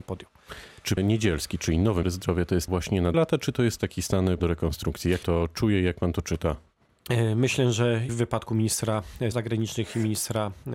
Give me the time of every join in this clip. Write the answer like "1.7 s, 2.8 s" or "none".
1.0 s, 2.0 s, 2.7 s, 3.1 s, 3.8 s, 4.4 s, 5.2 s, 8.1 s, 9.3 s